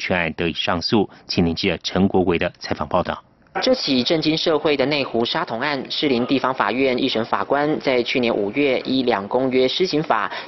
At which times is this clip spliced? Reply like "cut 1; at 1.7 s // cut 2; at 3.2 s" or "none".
none

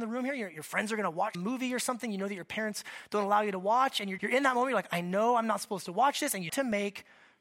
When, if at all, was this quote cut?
cut 1; at 1.3 s // cut 2; at 4.2 s // cut 3; at 6.5 s

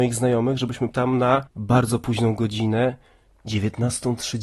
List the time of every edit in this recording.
cut 1; at 0.9 s

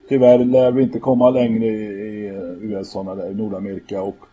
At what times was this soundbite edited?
none

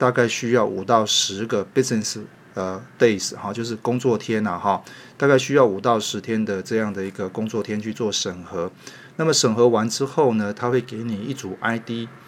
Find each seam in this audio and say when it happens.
none

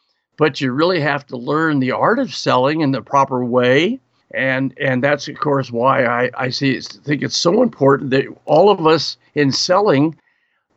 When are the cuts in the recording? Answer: cut 1; at 4.2 s

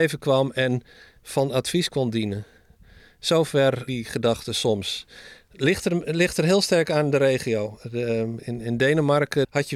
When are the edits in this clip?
cut 1; at 3.9 s

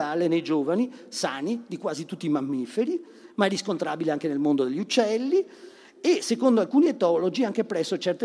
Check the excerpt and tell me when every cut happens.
none

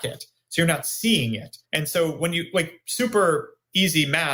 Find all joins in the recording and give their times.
cut 1; at 1.6 s

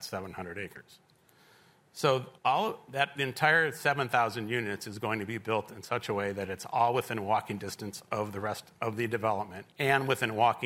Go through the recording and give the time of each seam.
cut 1; at 2.4 s // cut 2; at 9.7 s

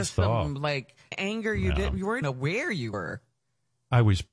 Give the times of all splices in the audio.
cut 1; at 1.1 s // cut 2; at 2.2 s

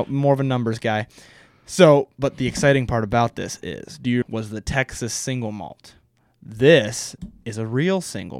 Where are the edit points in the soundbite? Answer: cut 1; at 4.2 s

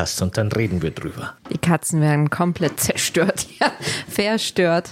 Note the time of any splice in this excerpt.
none

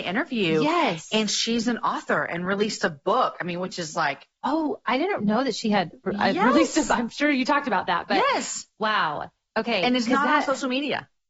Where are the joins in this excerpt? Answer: none

